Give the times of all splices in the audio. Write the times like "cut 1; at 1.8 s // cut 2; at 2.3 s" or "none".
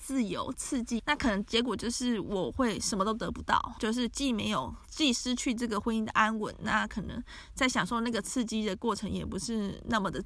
cut 1; at 1.0 s // cut 2; at 3.8 s